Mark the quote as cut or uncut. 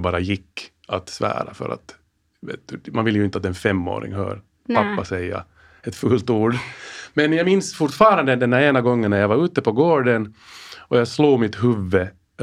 uncut